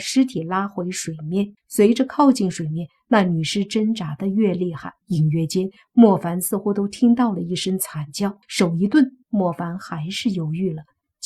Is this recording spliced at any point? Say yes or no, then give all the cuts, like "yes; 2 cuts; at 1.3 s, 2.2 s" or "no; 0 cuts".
yes; 4 cuts; at 1.6 s, 5.0 s, 8.4 s, 9.2 s